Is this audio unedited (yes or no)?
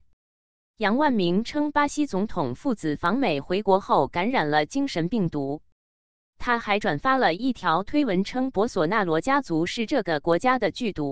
yes